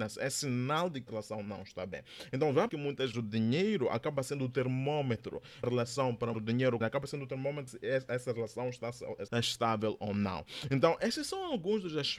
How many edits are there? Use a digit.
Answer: 8